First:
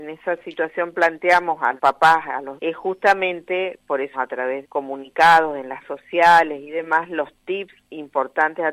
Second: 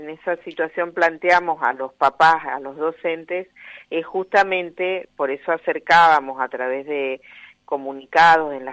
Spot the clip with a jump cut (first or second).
first